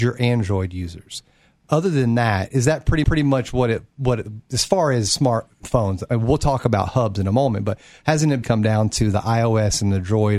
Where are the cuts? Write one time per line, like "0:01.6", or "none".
0:03.0
0:05.6
0:08.4